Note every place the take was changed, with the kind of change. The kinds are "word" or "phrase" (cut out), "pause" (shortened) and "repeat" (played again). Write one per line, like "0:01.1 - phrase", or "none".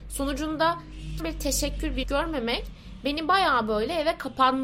0:01.2 - word
0:02.0 - word